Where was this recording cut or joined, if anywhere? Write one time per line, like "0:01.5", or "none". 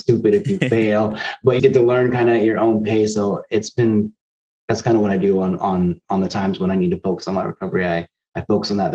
0:01.6